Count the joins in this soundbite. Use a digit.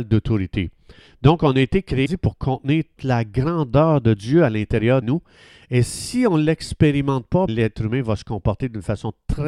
4